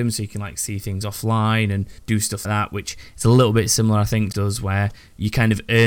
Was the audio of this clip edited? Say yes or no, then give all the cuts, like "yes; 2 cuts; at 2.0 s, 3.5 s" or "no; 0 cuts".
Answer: yes; 3 cuts; at 2.0 s, 2.4 s, 4.3 s